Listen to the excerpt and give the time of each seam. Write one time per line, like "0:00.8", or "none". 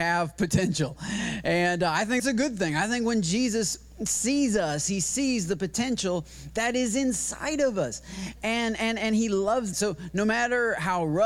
0:02.2
0:08.4
0:09.0
0:09.7

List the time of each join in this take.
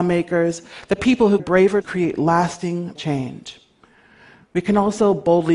0:01.4
0:01.8
0:03.0

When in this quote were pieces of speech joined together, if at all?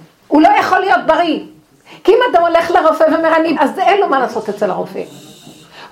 0:03.6

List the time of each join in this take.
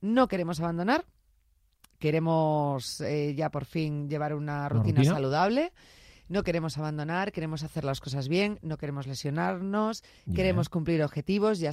none

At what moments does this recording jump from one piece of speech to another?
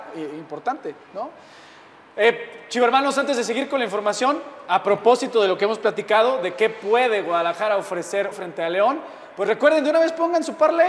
0:08.3

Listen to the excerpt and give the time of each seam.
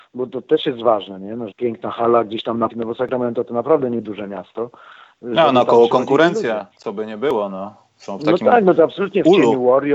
0:01.5
0:02.7

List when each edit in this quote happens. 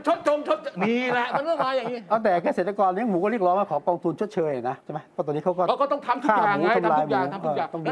0:04.8

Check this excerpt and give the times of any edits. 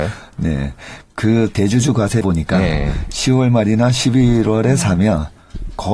0:02.2

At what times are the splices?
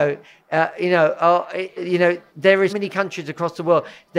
0:01.8
0:02.3
0:02.7

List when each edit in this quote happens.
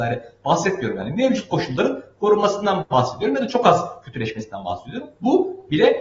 none

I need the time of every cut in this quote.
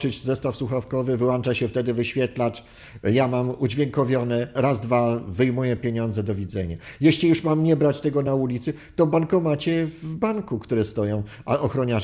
none

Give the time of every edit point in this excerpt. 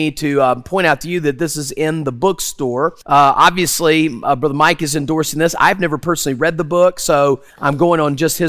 0:03.0
0:07.5

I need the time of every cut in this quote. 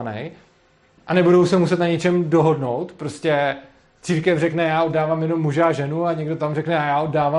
none

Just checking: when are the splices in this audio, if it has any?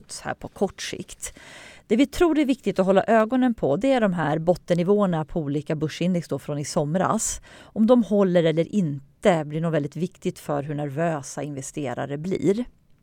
none

